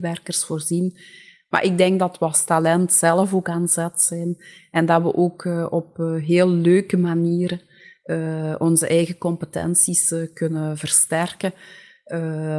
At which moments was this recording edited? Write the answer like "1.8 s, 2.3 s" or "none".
none